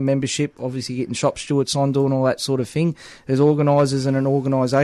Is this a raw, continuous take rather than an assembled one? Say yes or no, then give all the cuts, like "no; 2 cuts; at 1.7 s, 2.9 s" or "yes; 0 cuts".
yes; 0 cuts